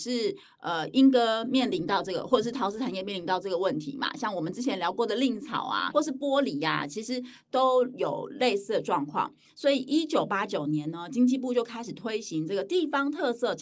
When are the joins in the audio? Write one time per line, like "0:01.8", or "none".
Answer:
0:05.9